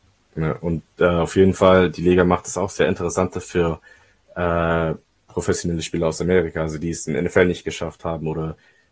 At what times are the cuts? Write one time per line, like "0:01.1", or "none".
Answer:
none